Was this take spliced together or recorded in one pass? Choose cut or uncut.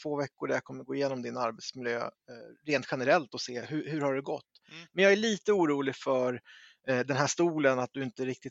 uncut